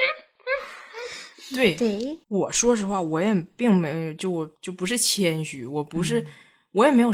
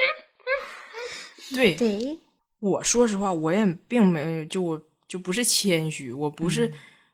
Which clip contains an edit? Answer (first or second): first